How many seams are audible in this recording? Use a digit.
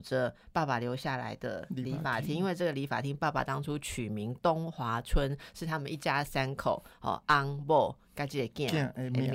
0